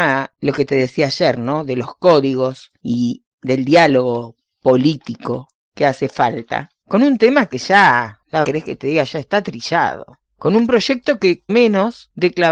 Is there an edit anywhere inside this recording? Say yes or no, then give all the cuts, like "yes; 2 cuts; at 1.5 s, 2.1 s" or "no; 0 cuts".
yes; 2 cuts; at 8.4 s, 11.5 s